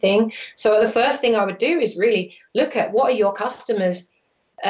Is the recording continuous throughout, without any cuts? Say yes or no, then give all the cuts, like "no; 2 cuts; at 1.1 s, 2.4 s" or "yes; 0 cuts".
yes; 0 cuts